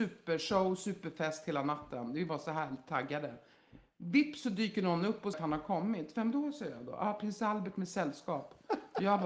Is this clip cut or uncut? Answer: cut